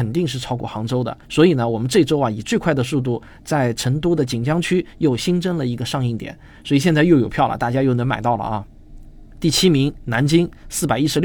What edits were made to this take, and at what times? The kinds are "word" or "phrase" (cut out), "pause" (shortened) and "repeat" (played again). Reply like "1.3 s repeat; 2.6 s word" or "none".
1.2 s pause